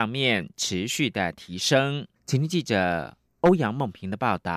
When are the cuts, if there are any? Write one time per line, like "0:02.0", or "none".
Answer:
0:02.2